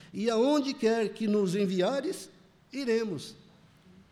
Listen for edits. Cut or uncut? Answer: uncut